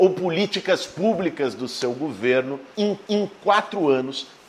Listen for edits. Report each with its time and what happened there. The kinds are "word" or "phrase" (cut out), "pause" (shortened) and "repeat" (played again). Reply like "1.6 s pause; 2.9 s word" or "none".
3.0 s repeat